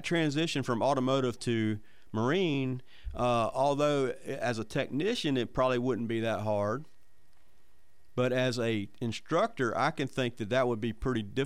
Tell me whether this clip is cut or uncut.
uncut